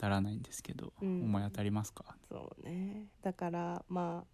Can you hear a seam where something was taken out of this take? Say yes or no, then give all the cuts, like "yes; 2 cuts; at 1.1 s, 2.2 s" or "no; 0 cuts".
yes; 2 cuts; at 2.2 s, 3.1 s